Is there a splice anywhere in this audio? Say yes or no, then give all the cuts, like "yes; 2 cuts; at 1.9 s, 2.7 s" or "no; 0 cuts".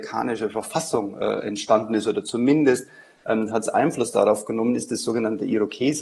no; 0 cuts